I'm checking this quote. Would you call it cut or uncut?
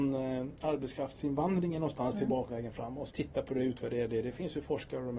cut